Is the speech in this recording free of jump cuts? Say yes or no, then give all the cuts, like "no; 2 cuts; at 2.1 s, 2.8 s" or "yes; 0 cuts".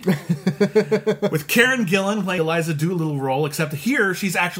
no; 1 cut; at 2.4 s